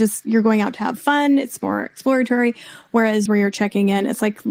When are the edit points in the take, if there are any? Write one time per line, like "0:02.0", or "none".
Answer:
0:03.3